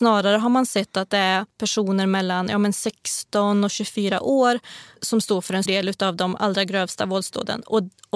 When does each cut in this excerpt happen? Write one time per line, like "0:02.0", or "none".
0:05.7